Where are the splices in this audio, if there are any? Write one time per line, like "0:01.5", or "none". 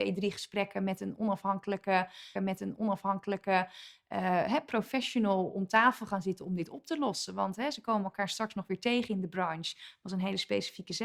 0:02.4